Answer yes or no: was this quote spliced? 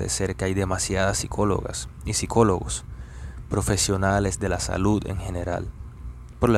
no